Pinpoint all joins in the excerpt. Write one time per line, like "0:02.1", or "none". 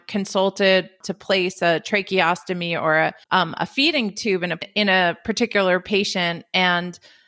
0:03.2